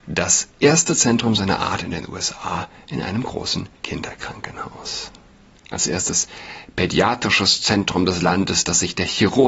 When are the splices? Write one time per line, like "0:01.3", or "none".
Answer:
0:03.7